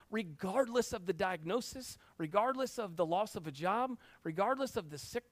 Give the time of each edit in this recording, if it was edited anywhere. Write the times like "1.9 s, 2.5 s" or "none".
none